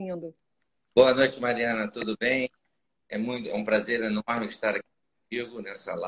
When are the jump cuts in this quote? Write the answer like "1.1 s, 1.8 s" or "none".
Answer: none

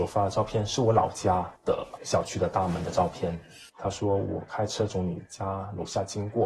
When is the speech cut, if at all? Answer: 1.6 s, 3.7 s

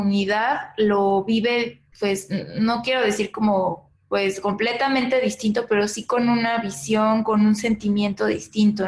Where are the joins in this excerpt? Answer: 1.9 s

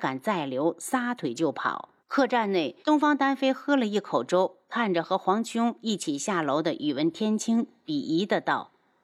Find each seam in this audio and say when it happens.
2.0 s, 2.8 s

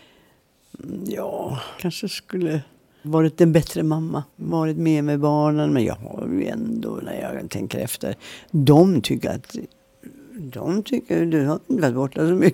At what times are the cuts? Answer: 1.8 s, 3.0 s, 4.3 s, 9.2 s

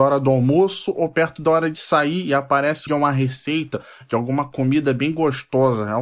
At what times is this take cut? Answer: 2.9 s

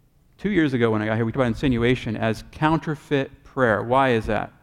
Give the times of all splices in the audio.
1.3 s

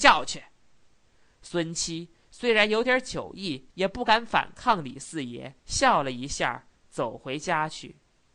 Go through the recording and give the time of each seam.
3.7 s, 5.6 s

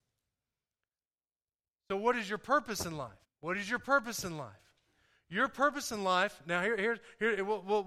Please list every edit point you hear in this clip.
3.2 s

